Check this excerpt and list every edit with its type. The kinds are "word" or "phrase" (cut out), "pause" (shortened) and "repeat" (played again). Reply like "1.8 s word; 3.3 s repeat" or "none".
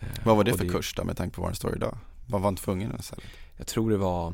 none